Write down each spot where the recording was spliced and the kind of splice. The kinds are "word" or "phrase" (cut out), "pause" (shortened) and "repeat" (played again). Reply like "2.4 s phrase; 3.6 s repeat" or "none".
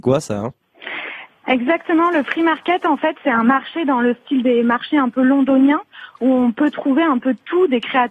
none